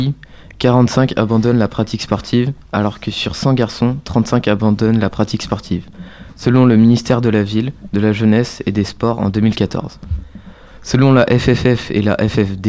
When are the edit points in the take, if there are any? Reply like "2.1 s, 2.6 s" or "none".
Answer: none